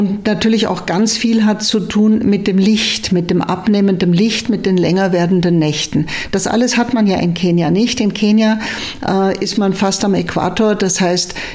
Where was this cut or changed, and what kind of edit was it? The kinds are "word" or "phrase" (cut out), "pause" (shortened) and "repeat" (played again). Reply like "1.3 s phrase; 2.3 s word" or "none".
none